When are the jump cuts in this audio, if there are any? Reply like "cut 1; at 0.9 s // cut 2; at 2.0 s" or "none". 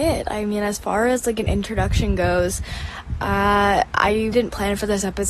cut 1; at 4.3 s